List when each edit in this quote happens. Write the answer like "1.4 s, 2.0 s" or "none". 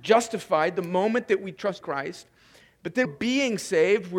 1.8 s, 3.0 s